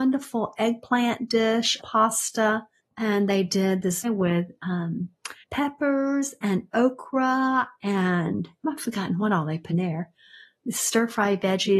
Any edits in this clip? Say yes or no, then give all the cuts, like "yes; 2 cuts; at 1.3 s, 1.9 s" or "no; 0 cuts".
yes; 6 cuts; at 1.8 s, 2.8 s, 4.0 s, 5.4 s, 8.6 s, 9.7 s